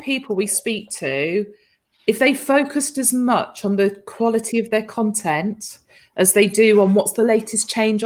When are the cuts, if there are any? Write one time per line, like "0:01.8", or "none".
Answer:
none